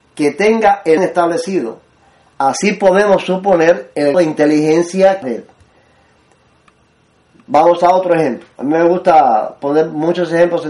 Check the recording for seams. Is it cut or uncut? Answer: cut